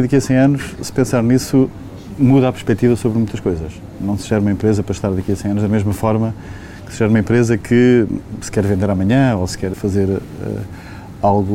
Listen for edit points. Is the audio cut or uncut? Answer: cut